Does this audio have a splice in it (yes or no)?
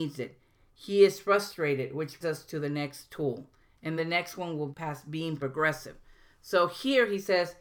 yes